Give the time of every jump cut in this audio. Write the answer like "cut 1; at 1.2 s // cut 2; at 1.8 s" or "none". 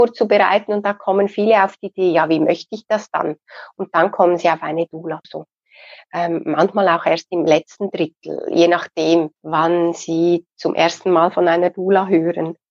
cut 1; at 5.2 s // cut 2; at 9.4 s